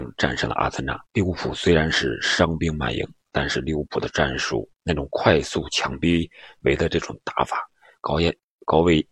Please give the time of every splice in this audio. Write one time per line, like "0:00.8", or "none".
0:01.0
0:04.7